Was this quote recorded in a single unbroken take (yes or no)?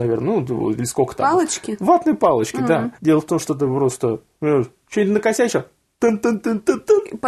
no